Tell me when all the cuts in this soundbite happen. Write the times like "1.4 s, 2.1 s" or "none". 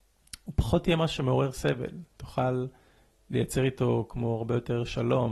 none